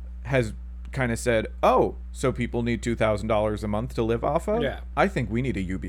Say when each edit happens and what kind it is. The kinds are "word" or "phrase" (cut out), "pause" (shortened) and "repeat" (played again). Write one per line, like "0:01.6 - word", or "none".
none